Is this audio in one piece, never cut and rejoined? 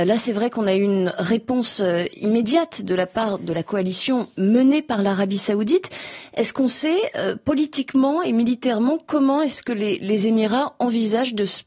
yes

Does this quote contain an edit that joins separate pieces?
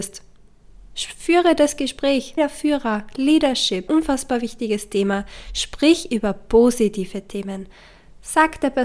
yes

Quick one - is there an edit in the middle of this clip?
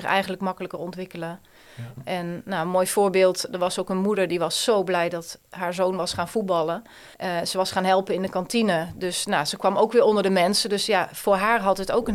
yes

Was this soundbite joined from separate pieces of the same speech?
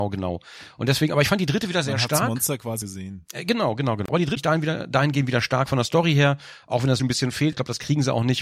yes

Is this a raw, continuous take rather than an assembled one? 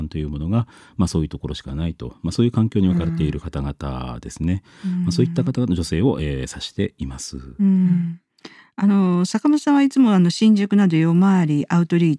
yes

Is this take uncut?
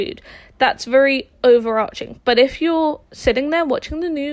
yes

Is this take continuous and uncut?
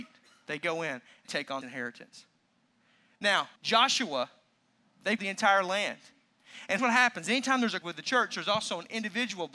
no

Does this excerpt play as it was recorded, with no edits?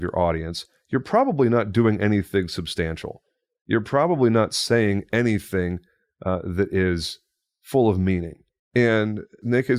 yes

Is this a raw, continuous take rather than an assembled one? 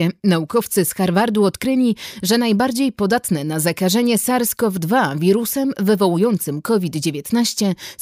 yes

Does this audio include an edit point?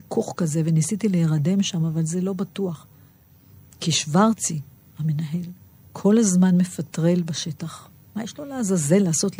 no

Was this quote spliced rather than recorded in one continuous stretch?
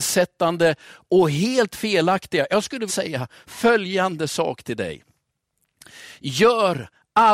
yes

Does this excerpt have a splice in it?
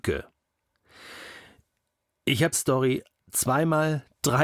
yes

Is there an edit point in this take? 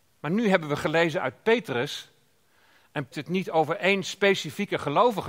yes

